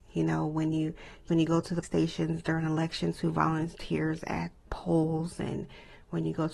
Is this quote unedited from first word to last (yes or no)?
no